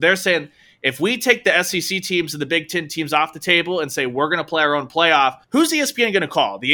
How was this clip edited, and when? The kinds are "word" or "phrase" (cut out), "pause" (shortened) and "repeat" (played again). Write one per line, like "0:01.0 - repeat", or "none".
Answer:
0:05.4 - pause